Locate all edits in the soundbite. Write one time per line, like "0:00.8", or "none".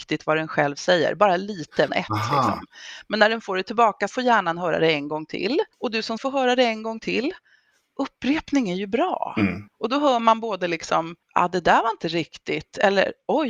0:01.9
0:04.1
0:05.7
0:06.2
0:09.7
0:11.2